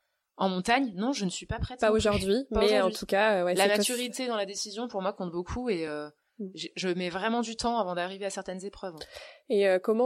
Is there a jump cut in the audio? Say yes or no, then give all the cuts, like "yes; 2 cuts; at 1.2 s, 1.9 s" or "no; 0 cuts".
no; 0 cuts